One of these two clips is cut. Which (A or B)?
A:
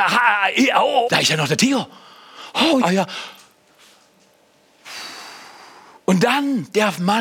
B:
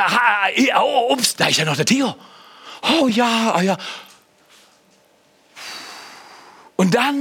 A